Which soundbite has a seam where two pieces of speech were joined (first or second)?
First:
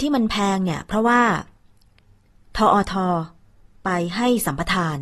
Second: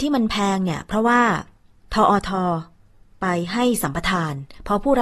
second